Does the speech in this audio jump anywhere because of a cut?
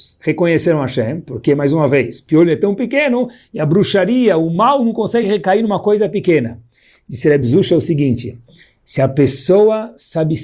no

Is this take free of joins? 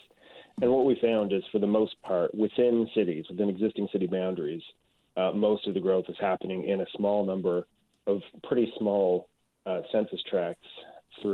yes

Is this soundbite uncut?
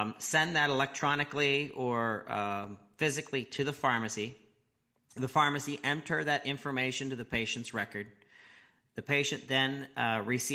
yes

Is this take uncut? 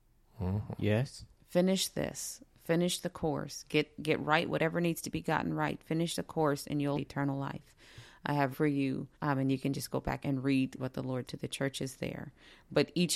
no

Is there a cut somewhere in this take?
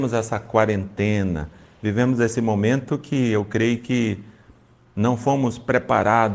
no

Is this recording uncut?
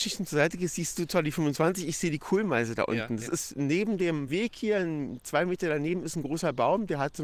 yes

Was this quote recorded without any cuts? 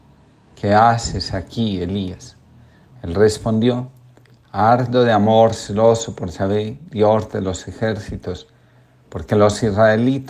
yes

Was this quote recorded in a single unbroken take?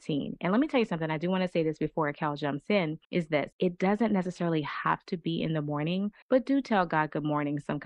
no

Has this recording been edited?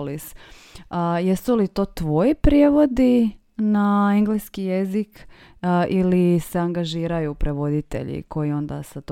no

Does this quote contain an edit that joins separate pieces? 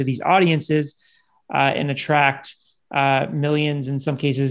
no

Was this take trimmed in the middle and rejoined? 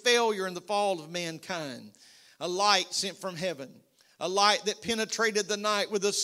no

